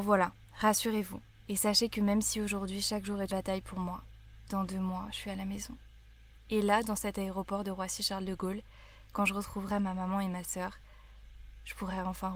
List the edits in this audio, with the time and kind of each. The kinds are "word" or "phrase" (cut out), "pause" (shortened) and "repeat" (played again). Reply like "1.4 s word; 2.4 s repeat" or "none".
3.3 s word